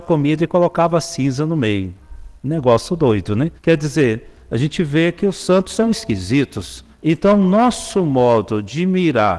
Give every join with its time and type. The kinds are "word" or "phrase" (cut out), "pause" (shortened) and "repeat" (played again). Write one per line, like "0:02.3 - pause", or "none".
0:02.4 - pause
0:03.6 - pause
0:06.9 - pause